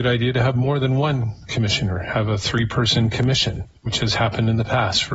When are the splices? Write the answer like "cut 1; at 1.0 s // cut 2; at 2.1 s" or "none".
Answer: cut 1; at 3.8 s